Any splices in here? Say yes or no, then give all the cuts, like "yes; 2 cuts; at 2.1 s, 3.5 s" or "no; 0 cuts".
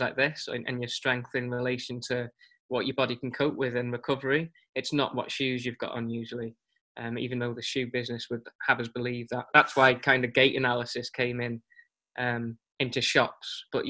no; 0 cuts